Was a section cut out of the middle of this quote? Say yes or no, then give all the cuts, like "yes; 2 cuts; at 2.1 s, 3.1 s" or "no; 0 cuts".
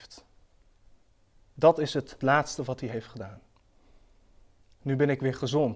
yes; 1 cut; at 2.2 s